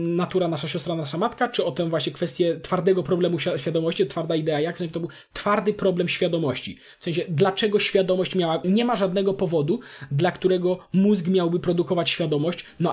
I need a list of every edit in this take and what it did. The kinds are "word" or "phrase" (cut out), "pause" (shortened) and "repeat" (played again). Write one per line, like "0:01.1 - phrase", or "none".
0:08.6 - word